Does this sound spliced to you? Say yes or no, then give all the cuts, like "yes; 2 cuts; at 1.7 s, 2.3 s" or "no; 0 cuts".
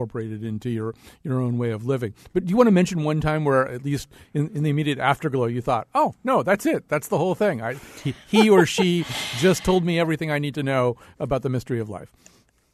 no; 0 cuts